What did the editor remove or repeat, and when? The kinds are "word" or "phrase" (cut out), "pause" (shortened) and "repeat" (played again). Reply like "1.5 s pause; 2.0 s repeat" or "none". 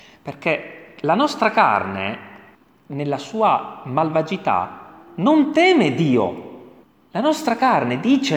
2.5 s pause; 6.8 s pause